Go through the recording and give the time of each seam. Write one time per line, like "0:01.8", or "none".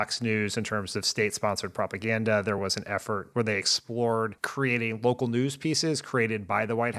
none